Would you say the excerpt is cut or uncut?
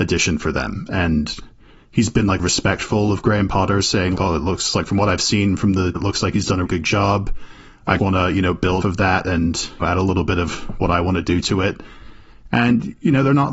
cut